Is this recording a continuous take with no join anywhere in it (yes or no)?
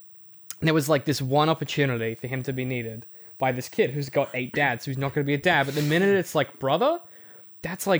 yes